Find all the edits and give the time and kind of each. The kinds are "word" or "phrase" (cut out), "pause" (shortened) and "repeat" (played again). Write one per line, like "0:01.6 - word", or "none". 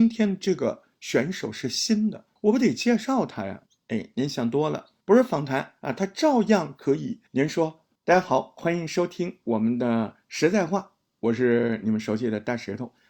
0:02.4 - pause
0:03.7 - pause
0:05.0 - pause
0:05.8 - pause
0:07.3 - pause
0:08.0 - pause